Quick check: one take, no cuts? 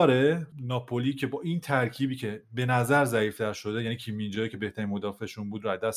yes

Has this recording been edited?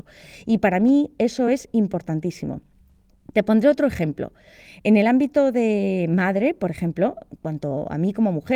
no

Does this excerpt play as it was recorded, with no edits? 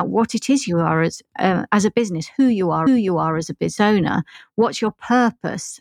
no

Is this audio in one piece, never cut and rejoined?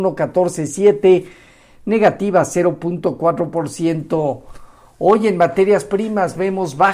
yes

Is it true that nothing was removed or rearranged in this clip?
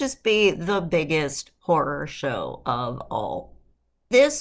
yes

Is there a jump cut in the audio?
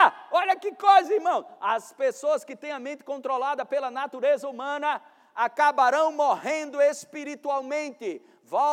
no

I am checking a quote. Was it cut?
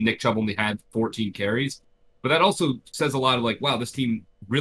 no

